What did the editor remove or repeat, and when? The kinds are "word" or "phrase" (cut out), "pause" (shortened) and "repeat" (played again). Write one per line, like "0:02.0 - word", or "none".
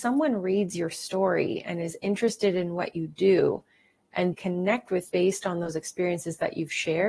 0:04.3 - word
0:05.1 - word